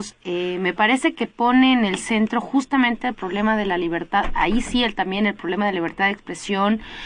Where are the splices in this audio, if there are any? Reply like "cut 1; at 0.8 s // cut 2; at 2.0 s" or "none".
none